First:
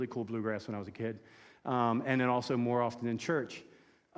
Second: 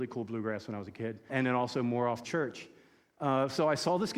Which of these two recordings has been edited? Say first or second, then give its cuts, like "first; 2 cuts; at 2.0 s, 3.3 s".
second; 2 cuts; at 1.3 s, 2.2 s